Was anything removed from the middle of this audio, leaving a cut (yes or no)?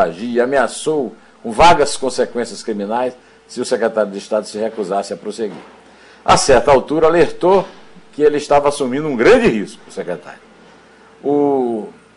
no